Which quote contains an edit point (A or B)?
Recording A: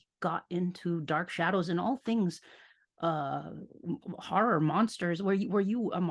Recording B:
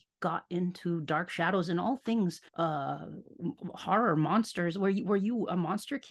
B